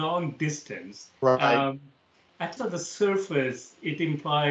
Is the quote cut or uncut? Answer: cut